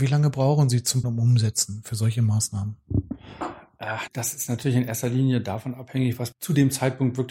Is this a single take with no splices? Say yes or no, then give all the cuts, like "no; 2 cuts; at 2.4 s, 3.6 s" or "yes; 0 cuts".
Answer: no; 3 cuts; at 1.0 s, 4.1 s, 6.3 s